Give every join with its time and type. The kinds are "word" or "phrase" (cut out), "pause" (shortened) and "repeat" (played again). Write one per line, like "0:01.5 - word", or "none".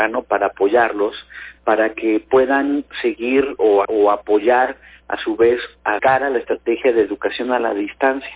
0:03.8 - word
0:06.0 - phrase